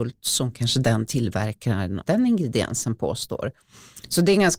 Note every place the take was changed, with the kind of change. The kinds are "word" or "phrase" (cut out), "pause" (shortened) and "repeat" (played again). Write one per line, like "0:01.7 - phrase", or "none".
0:02.1 - word